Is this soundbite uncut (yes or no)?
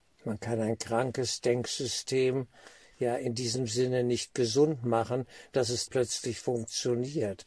no